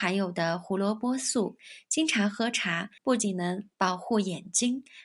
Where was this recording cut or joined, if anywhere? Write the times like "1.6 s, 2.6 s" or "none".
3.0 s, 3.7 s